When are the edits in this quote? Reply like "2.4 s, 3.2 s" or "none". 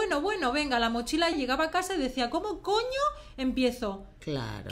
1.3 s